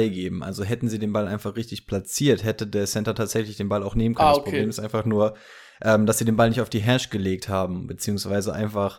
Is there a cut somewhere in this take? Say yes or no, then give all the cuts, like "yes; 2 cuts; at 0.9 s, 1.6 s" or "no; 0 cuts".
no; 0 cuts